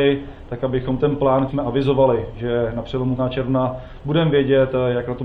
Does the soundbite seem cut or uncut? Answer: cut